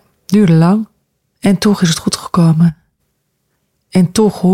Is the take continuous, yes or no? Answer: no